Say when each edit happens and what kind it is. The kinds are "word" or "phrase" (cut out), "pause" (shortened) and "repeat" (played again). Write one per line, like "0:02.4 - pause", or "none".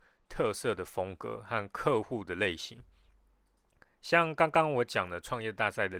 none